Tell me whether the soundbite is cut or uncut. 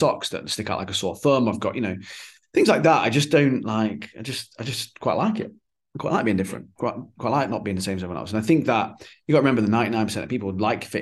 uncut